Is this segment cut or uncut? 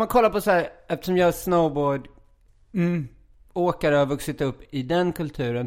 uncut